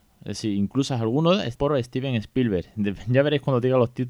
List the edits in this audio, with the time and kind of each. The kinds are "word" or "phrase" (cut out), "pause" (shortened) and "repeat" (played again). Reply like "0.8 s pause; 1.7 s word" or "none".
1.6 s word